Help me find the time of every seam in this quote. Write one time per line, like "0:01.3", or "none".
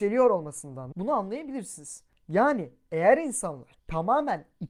0:00.9

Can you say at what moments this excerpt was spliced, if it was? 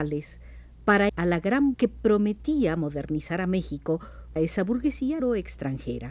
0:01.1
0:01.7
0:04.4
0:05.2

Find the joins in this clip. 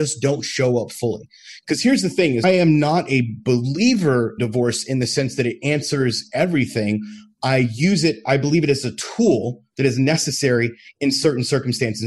0:02.4
0:04.4

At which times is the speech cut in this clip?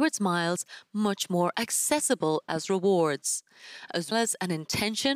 0:04.1

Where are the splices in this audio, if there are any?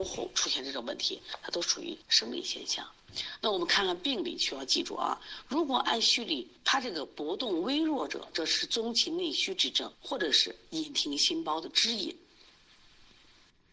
0:02.0
0:06.6
0:09.9

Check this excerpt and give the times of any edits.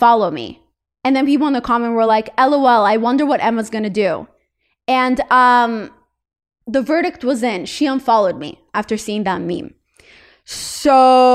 none

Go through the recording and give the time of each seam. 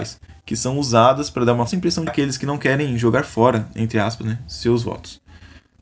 0:01.7
0:02.1

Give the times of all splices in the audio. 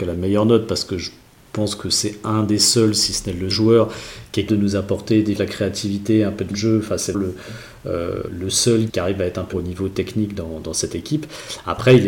0:03.5
0:04.5
0:05.4
0:06.5
0:07.1
0:08.3
0:08.9
0:09.5

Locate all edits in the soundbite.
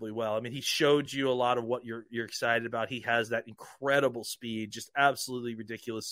none

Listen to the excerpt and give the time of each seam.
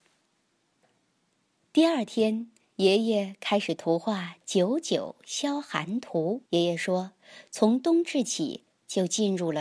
0:06.5

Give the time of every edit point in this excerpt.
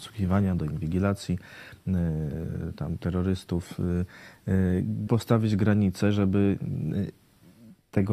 0:03.0
0:05.1

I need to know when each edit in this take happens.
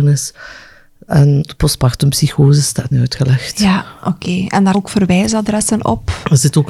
0:01.5
0:02.9
0:04.7

